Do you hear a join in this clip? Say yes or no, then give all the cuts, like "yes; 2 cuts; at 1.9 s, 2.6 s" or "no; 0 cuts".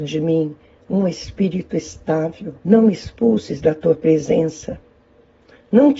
yes; 1 cut; at 2.6 s